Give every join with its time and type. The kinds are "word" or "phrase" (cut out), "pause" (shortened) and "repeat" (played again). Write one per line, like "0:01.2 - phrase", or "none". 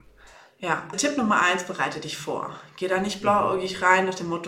0:00.9 - word